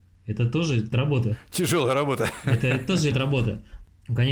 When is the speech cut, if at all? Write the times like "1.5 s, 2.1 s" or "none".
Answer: 0.9 s, 3.1 s